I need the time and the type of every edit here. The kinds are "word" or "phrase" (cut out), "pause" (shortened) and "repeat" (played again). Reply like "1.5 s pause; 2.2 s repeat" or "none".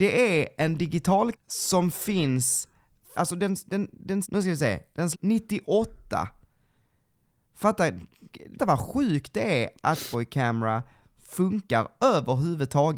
1.3 s word; 3.1 s word; 4.2 s word; 5.1 s word; 8.6 s word; 10.1 s word